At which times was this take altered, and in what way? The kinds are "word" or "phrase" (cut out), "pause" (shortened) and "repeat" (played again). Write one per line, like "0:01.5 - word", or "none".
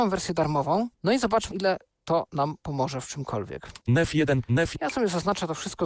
0:00.9 - pause
0:01.5 - word
0:03.8 - pause